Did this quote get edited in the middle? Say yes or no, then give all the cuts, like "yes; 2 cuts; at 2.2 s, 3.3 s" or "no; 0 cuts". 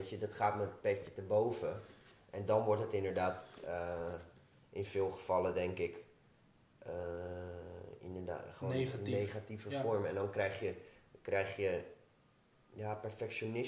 no; 0 cuts